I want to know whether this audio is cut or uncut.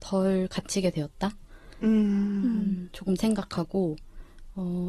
cut